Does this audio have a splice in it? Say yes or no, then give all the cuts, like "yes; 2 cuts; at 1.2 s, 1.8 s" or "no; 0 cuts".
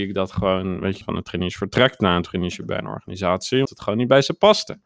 yes; 2 cuts; at 1.0 s, 3.7 s